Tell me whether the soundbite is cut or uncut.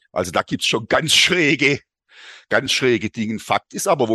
uncut